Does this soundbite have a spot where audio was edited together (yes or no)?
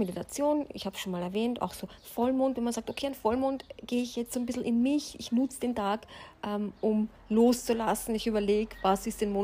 no